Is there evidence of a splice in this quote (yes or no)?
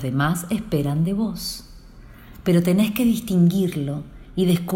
no